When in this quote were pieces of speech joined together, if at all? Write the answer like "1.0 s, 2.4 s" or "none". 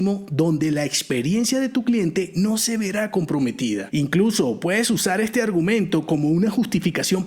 none

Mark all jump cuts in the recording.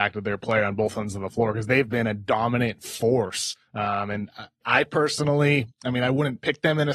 1.9 s, 4.6 s

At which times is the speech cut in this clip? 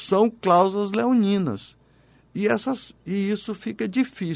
none

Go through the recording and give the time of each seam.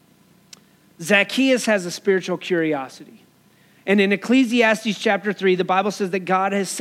none

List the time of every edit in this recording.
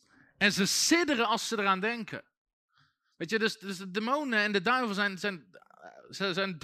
none

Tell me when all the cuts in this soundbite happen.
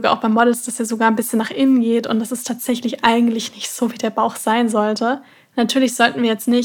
5.3 s

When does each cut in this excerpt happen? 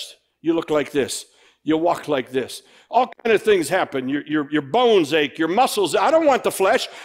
none

